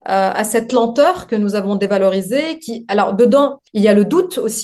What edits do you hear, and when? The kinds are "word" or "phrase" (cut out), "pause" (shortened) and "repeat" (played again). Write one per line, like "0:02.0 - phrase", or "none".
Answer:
0:03.7 - pause